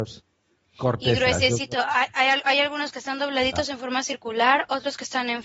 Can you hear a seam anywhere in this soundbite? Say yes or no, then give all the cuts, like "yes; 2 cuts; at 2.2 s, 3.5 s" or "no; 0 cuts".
no; 0 cuts